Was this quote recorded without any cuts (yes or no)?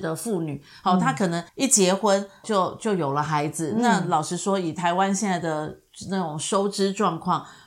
no